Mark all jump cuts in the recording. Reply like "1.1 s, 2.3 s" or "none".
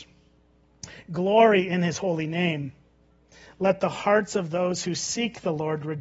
none